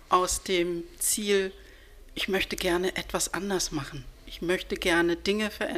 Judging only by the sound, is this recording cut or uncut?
uncut